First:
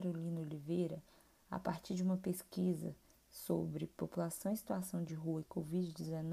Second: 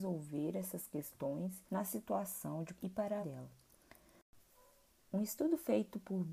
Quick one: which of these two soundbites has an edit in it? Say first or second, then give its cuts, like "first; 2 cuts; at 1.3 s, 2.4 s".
second; 3 cuts; at 1.7 s, 2.8 s, 3.2 s